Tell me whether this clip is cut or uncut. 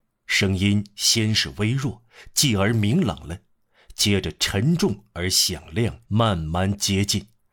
cut